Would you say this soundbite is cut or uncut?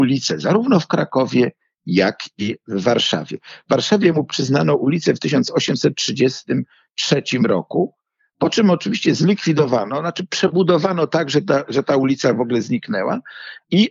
uncut